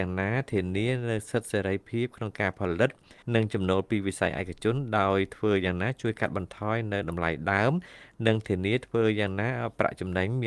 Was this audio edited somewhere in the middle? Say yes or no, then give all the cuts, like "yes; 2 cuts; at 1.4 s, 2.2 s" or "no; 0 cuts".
yes; 1 cut; at 3.2 s